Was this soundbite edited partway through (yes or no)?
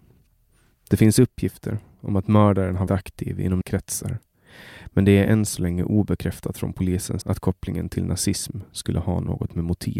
yes